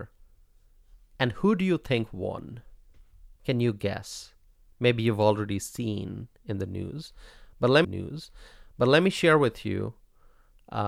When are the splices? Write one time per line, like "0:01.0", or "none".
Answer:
0:03.4
0:07.8

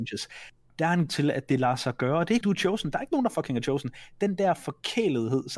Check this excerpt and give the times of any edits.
0:01.1
0:02.4

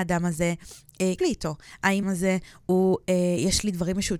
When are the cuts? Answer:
0:01.2
0:02.0

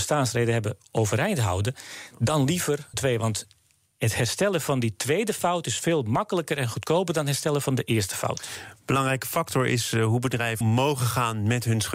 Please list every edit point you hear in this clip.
0:02.9
0:10.6

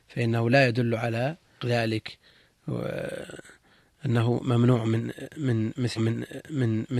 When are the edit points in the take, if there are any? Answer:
0:01.6
0:06.0

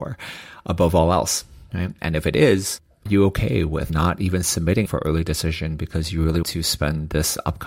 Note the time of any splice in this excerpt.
0:03.1
0:03.9
0:04.9
0:06.4

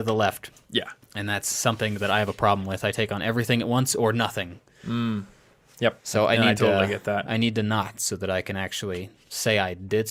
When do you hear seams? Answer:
0:01.0
0:06.0

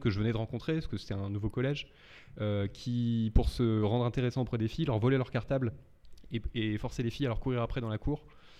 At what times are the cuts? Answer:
none

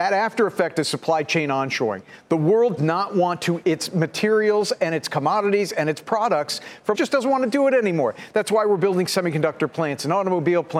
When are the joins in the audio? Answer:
0:02.8
0:03.6
0:06.9

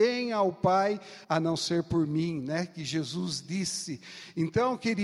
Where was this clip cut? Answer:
0:01.2

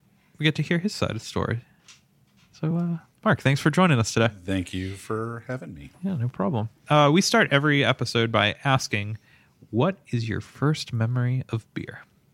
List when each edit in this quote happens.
none

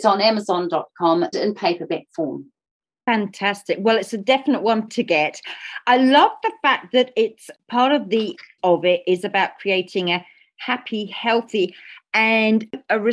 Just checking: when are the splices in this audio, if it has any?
0:01.3
0:04.9
0:08.6

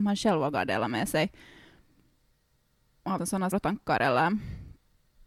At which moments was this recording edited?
0:03.2
0:03.5

